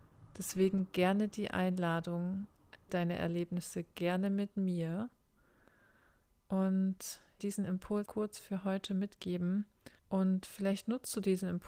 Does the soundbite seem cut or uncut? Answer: cut